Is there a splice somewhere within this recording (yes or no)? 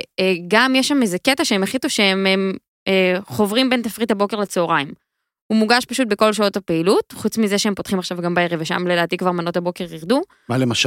no